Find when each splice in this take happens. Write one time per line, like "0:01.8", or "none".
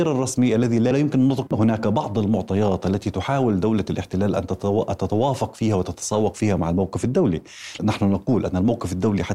0:00.9
0:01.5
0:07.8